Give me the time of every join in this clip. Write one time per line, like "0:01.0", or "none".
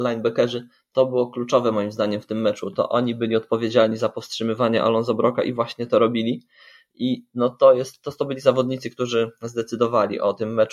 none